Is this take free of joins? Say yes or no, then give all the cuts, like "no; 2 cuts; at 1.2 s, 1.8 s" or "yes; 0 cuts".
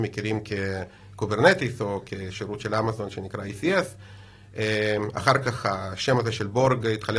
yes; 0 cuts